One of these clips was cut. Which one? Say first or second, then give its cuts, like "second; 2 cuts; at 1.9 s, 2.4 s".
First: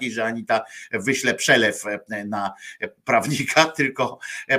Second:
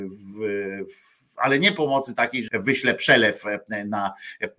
second; 1 cut; at 2.5 s